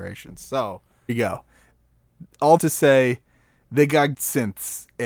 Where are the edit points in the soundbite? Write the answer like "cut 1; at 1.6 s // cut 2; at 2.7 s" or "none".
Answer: cut 1; at 1.1 s // cut 2; at 2.6 s // cut 3; at 4.1 s